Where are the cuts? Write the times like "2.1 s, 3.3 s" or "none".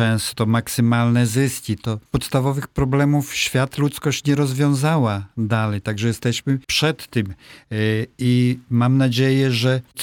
2.1 s, 6.6 s